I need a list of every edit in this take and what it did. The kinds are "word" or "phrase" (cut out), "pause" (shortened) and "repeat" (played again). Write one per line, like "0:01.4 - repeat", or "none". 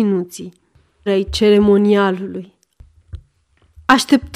0:01.1 - word